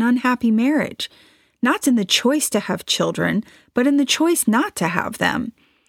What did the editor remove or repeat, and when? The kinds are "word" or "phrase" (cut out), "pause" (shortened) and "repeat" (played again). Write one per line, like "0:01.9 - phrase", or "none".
0:01.8 - word